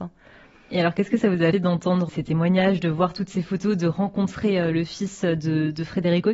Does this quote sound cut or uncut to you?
cut